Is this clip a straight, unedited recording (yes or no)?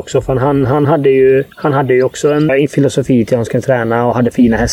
no